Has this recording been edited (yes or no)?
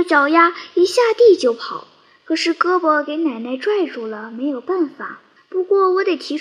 yes